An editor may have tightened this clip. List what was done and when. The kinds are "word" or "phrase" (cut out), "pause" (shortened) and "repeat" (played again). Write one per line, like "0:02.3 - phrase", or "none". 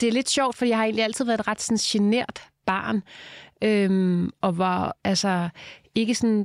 none